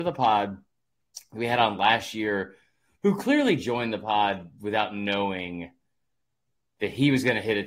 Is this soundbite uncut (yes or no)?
yes